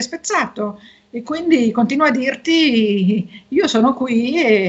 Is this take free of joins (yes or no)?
yes